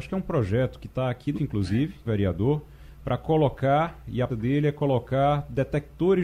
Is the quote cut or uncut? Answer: cut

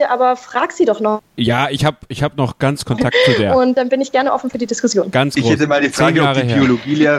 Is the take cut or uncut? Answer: cut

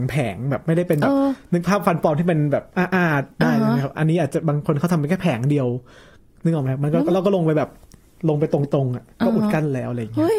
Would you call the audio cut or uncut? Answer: cut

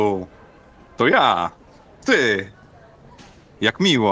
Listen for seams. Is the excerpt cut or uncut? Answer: cut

